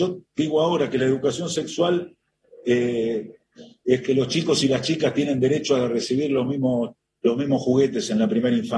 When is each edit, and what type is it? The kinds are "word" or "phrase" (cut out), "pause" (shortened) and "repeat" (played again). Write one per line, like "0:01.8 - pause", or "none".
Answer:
none